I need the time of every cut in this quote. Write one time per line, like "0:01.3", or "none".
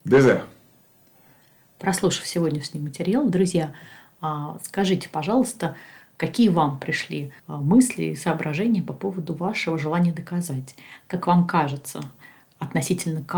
0:07.4